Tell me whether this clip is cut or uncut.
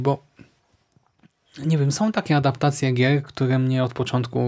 uncut